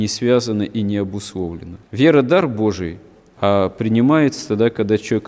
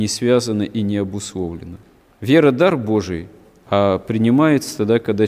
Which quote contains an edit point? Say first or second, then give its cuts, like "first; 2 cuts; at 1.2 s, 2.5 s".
first; 1 cut; at 1.8 s